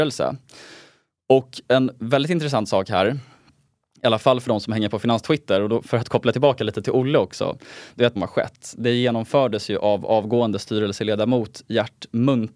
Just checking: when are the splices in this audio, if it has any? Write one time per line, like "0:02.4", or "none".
0:08.2